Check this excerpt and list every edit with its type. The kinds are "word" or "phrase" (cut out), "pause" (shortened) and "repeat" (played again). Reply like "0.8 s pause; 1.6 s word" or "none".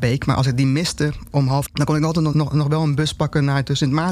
1.7 s phrase; 2.3 s word